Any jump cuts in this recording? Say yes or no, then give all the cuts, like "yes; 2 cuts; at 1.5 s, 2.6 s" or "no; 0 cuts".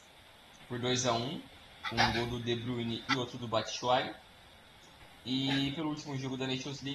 no; 0 cuts